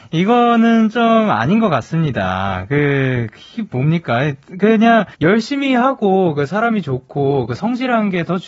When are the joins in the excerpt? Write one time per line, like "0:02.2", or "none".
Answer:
0:05.1